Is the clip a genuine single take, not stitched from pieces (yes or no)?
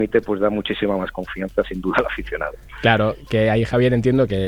yes